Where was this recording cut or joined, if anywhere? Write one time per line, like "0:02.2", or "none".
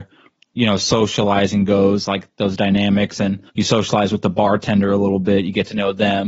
0:03.5